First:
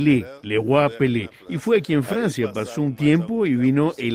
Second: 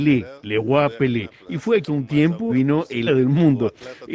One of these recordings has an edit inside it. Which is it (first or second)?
second